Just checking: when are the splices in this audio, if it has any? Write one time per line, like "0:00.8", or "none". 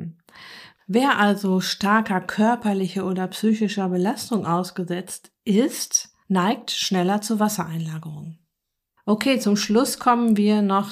none